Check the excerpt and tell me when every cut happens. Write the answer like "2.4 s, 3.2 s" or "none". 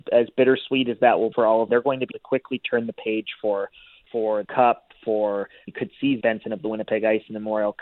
1.3 s, 1.7 s, 2.1 s, 4.1 s, 4.4 s, 5.7 s, 6.2 s